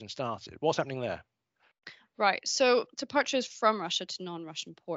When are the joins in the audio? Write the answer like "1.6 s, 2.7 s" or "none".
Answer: 2.9 s